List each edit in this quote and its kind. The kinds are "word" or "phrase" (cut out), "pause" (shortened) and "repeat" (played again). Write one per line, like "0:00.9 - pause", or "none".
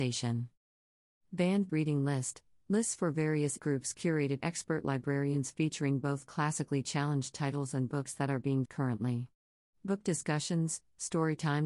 0:01.7 - word
0:03.6 - word
0:04.4 - word
0:08.7 - word